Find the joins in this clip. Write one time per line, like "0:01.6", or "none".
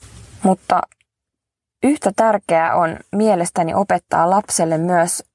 none